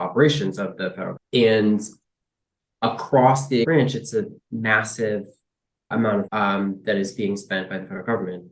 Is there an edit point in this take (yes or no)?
yes